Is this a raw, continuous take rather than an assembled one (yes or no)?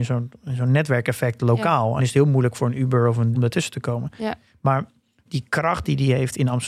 no